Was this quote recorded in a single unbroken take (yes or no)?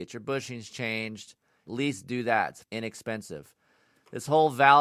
no